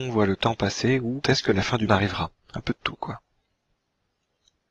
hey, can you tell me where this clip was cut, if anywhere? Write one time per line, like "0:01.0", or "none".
0:01.2
0:01.9

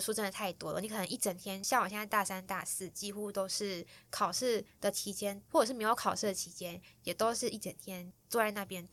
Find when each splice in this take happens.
0:05.5

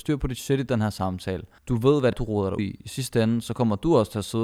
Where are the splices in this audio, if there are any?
0:01.6
0:02.1
0:02.6

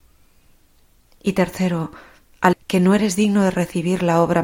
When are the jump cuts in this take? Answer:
0:02.5

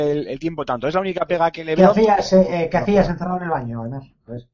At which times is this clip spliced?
none

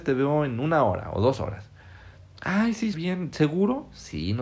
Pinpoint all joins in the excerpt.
0:02.9

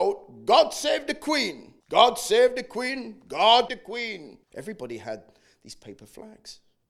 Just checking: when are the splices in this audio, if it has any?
0:01.8
0:03.7
0:04.4

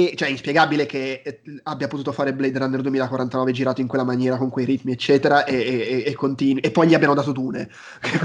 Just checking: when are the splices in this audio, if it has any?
none

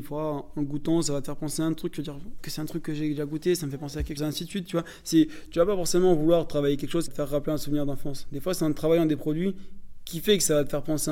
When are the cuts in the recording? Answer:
0:02.4
0:04.2
0:07.1

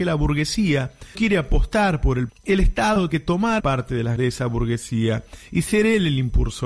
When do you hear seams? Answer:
0:01.1
0:02.3
0:03.1
0:03.6
0:04.2

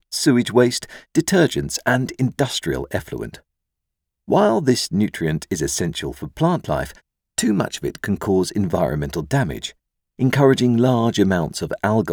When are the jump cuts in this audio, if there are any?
none

